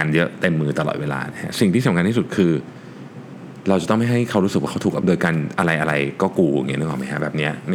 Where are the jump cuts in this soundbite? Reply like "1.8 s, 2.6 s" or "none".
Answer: 5.0 s